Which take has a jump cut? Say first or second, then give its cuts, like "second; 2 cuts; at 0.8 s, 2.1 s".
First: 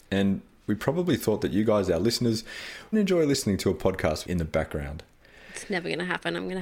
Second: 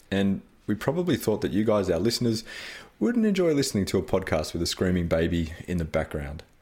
first; 2 cuts; at 2.9 s, 4.3 s